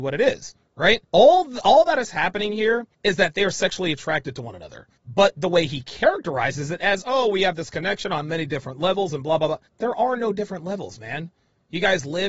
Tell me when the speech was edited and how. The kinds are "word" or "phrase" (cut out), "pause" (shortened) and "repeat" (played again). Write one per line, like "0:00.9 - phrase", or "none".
0:01.1 - pause
0:02.9 - pause
0:05.0 - pause
0:09.7 - pause